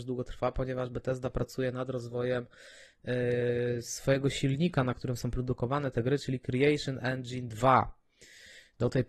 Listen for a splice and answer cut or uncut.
uncut